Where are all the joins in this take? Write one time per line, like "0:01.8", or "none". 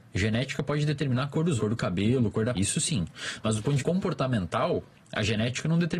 0:01.6
0:02.5
0:03.8